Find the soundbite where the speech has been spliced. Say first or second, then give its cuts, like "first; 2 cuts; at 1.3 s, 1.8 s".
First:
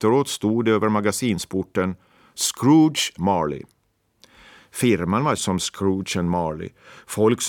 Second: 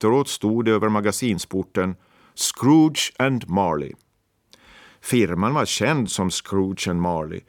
first; 2 cuts; at 3.2 s, 5.4 s